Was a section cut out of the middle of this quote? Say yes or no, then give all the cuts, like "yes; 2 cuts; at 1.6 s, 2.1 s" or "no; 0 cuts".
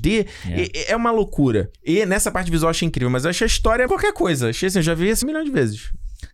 yes; 3 cuts; at 1.7 s, 3.9 s, 5.2 s